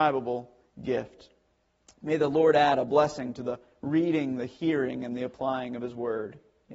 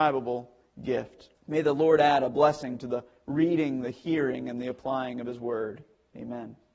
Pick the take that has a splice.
second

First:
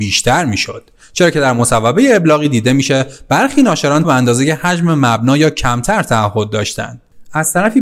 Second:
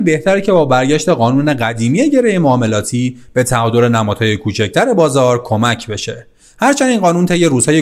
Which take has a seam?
first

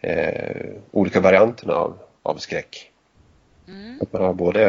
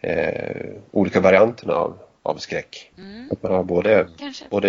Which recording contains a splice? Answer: second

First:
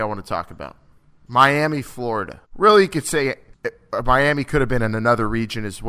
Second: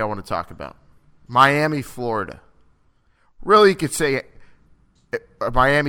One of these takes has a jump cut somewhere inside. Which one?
first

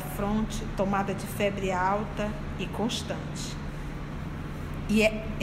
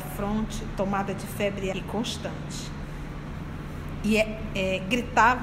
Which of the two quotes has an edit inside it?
second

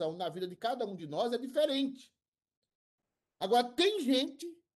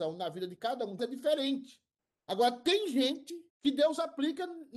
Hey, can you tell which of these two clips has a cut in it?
second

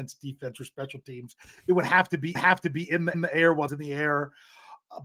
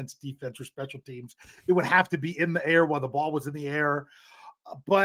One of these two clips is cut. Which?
first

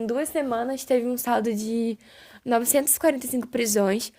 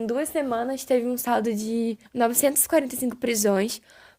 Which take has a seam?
second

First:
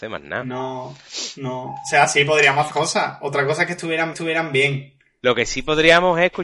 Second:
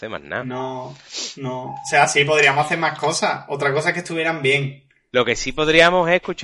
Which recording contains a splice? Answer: first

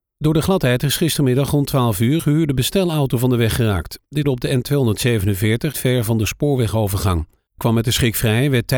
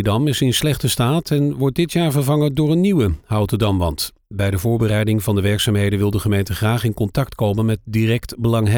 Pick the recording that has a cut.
first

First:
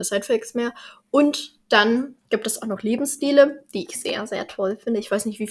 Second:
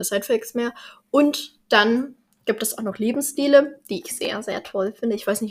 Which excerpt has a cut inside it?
first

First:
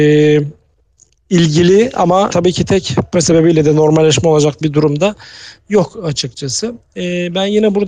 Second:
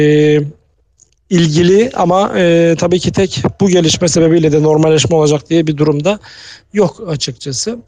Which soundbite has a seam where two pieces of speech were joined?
first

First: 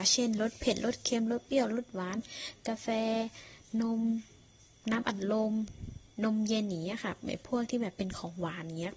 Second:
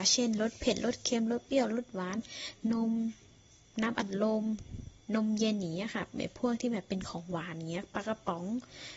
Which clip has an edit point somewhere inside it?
second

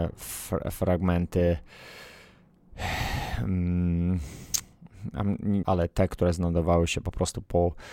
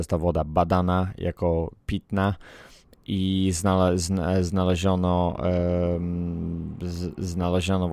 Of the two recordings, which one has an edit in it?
first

